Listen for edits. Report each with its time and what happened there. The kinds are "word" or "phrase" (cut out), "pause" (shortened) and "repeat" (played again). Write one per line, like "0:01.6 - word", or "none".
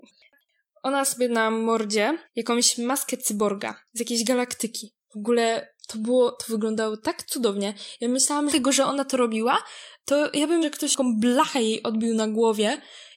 0:01.0 - word
0:02.2 - pause
0:03.9 - pause
0:05.8 - pause
0:08.5 - phrase
0:10.6 - word

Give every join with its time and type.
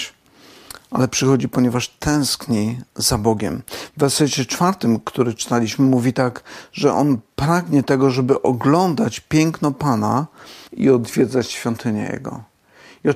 0:10.7 - pause

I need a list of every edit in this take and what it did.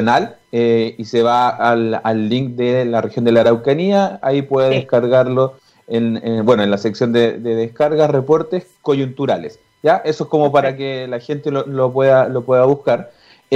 none

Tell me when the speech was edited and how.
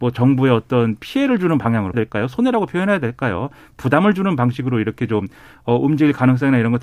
0:01.9 - phrase

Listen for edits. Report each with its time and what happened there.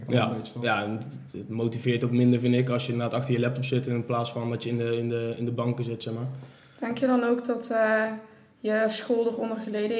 none

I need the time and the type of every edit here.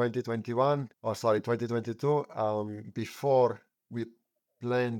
0:00.9 - pause

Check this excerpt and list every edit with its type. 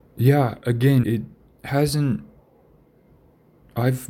0:01.0 - word

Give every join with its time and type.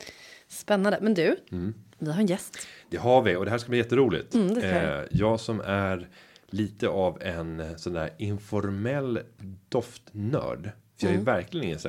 none

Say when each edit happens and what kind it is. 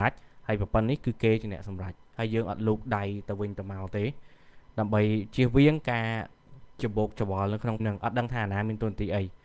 0:07.8 - word

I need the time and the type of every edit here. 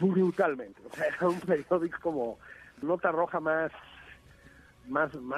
0:02.0 - word
0:02.8 - word

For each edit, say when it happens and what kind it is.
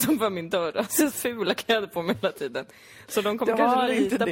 0:01.1 - word

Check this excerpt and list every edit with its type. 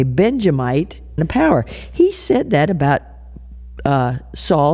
0:01.2 - phrase

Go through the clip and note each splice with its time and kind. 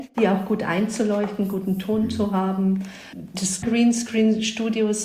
0:03.6 - word

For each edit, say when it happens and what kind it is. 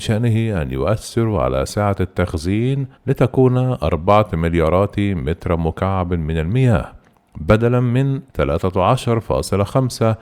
0:03.0 - pause
0:08.3 - pause

